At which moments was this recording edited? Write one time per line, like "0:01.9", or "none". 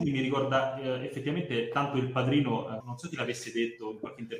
0:02.8